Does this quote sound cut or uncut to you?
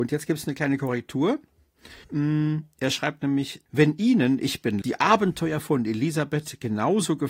cut